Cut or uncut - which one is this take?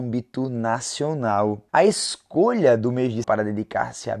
cut